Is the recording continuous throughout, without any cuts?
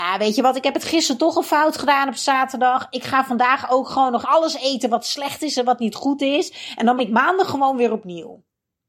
no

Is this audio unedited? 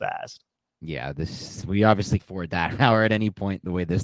no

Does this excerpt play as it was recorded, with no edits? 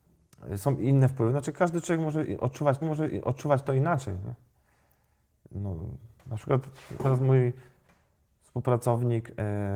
no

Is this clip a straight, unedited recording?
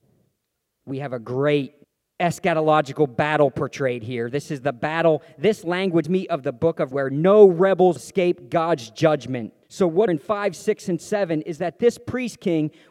no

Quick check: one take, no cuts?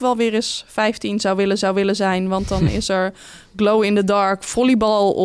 no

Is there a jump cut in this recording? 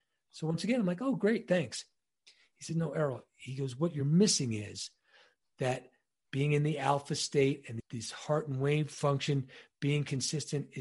no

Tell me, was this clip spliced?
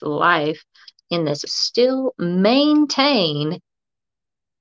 yes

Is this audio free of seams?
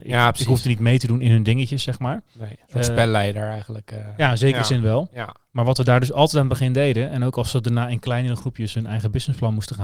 no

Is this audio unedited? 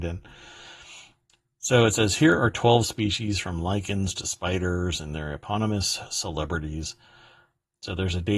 yes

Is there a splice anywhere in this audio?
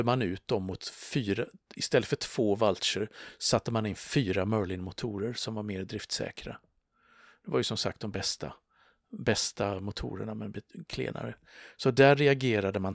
no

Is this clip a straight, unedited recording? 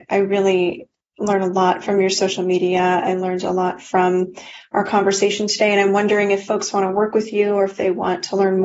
yes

